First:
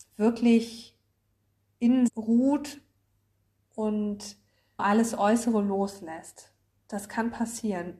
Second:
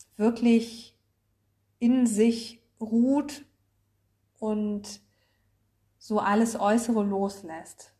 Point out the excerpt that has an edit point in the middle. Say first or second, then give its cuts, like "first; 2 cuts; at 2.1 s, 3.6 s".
first; 2 cuts; at 2.1 s, 4.8 s